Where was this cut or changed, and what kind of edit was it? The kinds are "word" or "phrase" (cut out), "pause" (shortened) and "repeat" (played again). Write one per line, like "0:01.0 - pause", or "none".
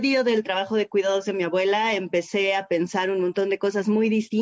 none